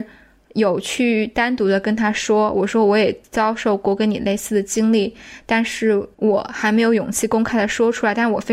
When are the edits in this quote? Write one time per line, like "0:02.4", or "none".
0:06.1